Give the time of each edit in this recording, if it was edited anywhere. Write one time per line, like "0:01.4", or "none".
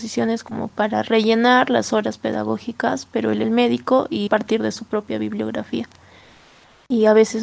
0:03.4
0:04.3